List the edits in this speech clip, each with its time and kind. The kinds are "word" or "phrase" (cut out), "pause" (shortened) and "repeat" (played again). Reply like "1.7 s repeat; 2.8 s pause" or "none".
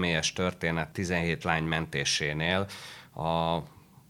0.9 s word; 1.4 s word